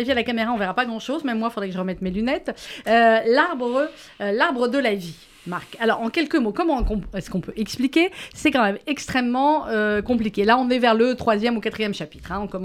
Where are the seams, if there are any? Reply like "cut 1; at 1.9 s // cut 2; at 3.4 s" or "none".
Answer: none

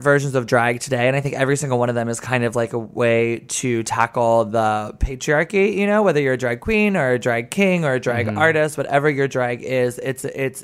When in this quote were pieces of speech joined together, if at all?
none

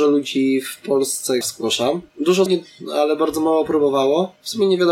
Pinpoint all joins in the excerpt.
cut 1; at 1.4 s // cut 2; at 2.5 s

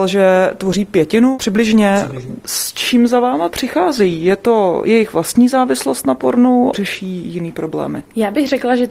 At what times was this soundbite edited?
cut 1; at 6.7 s

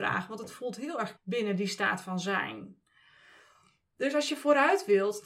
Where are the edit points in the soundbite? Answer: cut 1; at 1.2 s

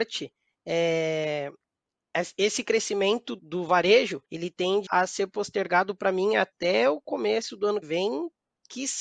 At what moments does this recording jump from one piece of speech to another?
cut 1; at 3.4 s // cut 2; at 4.2 s // cut 3; at 4.9 s // cut 4; at 7.8 s

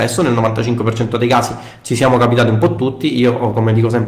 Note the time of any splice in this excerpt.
none

